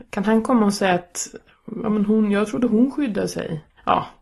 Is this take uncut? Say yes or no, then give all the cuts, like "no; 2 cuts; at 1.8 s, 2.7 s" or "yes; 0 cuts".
yes; 0 cuts